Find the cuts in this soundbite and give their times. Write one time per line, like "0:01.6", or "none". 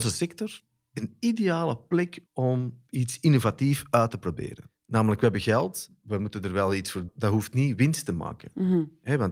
0:02.3
0:07.1